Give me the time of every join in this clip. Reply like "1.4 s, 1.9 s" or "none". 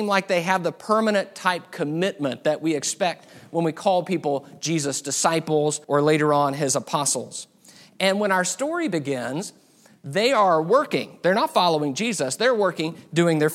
5.8 s

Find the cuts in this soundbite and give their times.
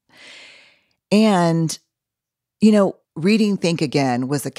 3.0 s

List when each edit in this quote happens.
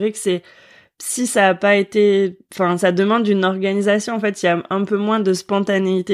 none

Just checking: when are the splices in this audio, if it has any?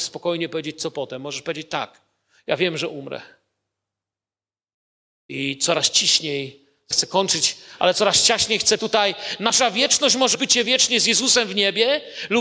6.9 s, 8.8 s, 10.3 s

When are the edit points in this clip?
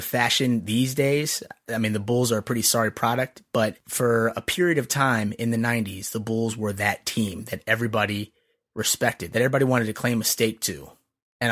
none

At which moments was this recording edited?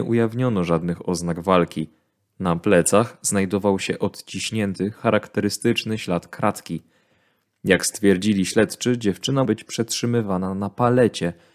9.4 s

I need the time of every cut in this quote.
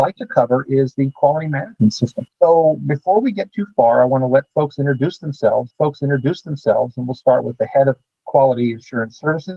2.3 s, 5.7 s

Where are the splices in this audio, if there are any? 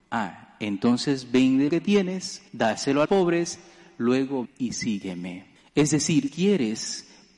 1.7 s, 2.5 s, 3.0 s, 4.4 s, 5.6 s, 6.3 s

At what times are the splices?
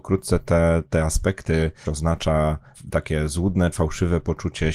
1.9 s, 3.7 s

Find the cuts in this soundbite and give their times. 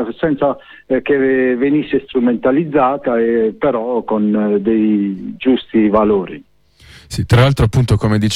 none

